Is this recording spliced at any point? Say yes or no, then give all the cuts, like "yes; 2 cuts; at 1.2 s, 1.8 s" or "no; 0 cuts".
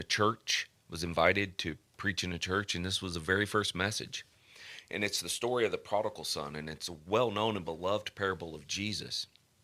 no; 0 cuts